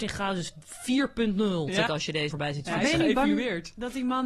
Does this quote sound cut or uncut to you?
cut